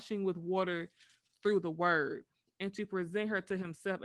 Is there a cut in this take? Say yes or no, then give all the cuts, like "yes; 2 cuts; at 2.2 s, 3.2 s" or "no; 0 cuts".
no; 0 cuts